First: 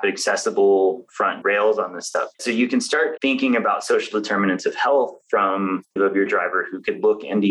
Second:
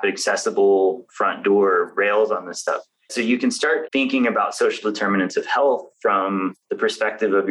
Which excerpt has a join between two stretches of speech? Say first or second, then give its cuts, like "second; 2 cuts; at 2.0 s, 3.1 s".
first; 4 cuts; at 1.4 s, 2.3 s, 6.0 s, 6.3 s